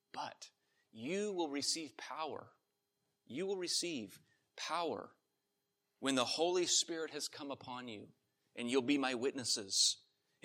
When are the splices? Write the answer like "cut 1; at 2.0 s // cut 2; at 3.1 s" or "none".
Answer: none